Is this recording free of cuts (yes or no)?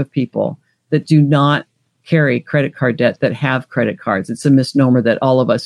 yes